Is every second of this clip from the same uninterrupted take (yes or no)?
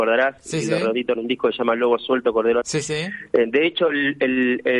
no